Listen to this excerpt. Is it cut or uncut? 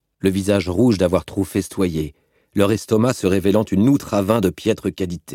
uncut